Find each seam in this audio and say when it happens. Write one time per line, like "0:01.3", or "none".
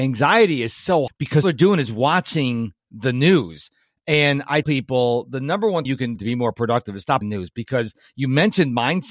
0:01.1
0:01.4
0:04.6
0:05.9
0:06.2
0:07.2